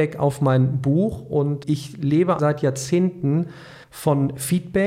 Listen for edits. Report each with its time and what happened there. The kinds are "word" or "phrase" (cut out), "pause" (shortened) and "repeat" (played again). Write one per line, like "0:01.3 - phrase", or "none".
0:01.6 - word
0:02.4 - word
0:03.8 - pause